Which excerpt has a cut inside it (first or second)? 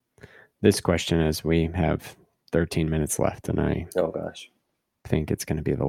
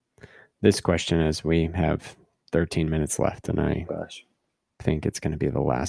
second